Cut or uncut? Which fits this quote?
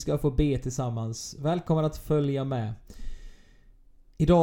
uncut